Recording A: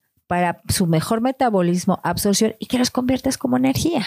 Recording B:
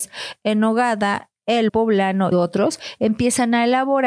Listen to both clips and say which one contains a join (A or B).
B